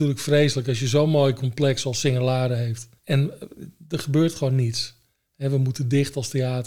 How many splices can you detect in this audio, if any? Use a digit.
1